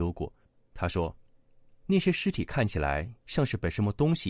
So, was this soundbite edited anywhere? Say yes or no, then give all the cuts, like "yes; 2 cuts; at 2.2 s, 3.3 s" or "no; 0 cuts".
no; 0 cuts